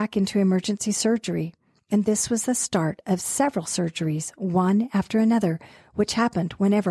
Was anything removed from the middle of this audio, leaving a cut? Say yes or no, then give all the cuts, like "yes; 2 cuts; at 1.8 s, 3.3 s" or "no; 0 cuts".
no; 0 cuts